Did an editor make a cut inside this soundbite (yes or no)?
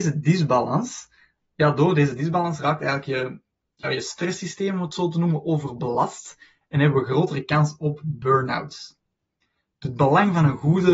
no